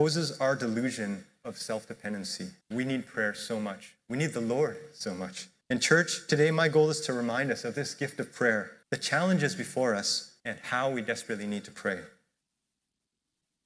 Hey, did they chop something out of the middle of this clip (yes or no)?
yes